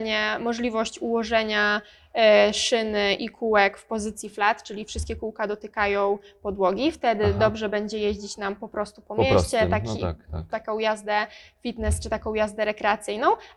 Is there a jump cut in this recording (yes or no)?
no